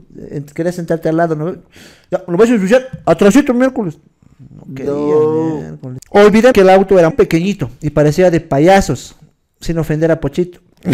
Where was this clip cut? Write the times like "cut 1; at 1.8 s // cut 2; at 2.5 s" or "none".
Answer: cut 1; at 6.5 s // cut 2; at 7.1 s